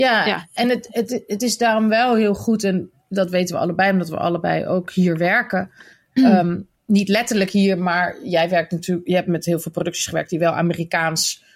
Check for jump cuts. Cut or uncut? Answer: uncut